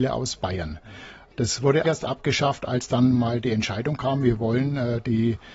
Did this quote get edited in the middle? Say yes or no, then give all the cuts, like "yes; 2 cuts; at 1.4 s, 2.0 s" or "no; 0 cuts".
yes; 1 cut; at 1.8 s